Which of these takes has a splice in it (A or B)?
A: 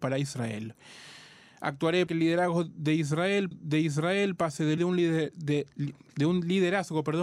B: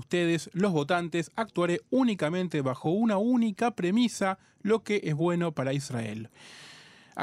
A